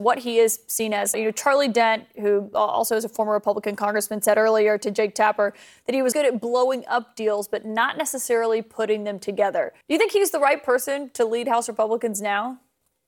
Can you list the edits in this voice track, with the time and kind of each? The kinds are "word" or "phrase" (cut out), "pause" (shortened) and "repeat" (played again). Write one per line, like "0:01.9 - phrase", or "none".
0:01.1 - word
0:06.1 - word
0:09.8 - pause